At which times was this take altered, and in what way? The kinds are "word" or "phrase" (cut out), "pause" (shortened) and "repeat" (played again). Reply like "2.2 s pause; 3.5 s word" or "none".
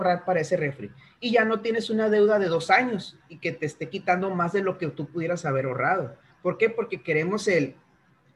none